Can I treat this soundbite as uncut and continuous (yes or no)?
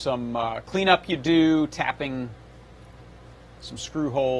yes